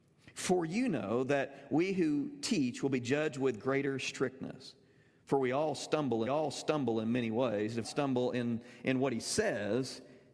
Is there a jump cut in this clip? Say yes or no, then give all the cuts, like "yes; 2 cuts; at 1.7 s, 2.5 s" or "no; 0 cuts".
yes; 2 cuts; at 6.3 s, 7.8 s